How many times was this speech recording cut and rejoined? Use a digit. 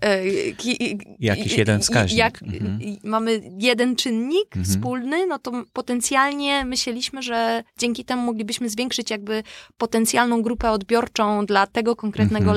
1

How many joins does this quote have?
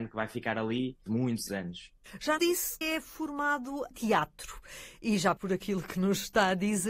6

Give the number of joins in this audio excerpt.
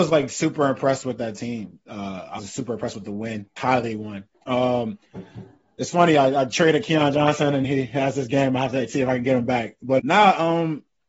5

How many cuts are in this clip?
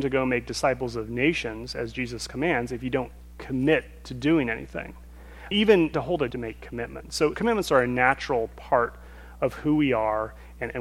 4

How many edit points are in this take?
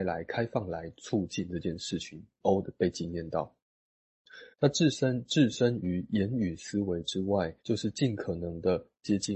3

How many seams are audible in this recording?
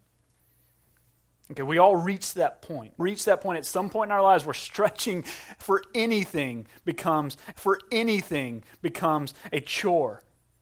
2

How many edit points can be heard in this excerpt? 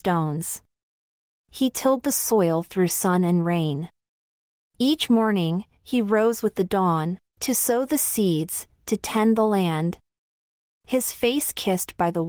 1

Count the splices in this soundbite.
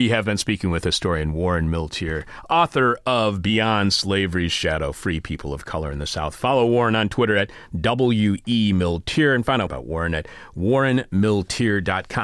1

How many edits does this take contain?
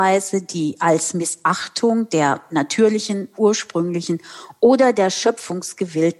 0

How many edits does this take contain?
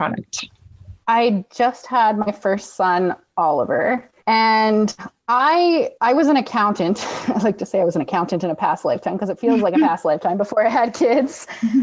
3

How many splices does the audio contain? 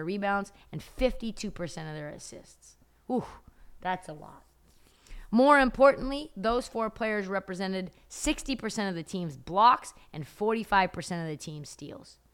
0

